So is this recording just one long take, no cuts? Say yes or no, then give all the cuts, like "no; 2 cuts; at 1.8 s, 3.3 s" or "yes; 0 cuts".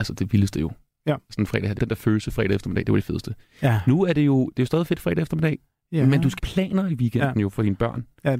no; 2 cuts; at 1.8 s, 6.4 s